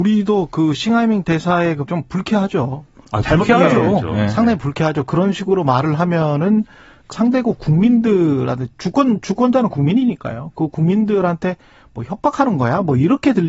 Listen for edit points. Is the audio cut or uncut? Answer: cut